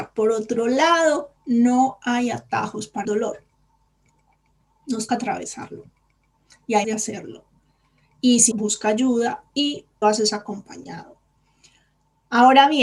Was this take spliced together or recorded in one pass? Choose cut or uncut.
cut